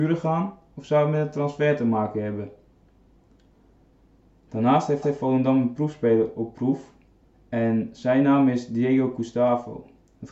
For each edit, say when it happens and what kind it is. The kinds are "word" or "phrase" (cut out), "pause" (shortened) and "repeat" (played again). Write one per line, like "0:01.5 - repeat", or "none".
0:05.0 - repeat
0:07.2 - pause